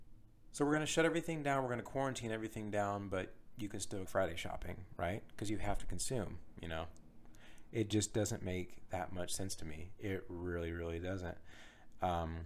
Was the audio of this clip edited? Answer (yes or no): yes